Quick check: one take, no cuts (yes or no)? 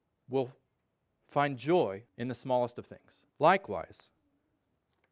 no